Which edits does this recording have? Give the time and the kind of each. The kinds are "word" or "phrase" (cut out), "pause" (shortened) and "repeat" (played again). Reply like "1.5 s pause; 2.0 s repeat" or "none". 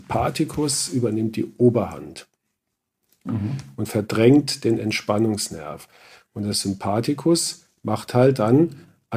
none